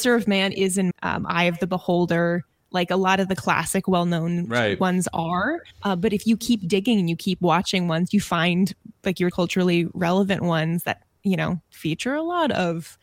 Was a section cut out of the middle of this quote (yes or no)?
yes